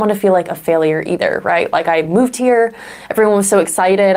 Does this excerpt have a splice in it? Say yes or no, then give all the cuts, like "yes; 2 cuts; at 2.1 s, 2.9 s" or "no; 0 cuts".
no; 0 cuts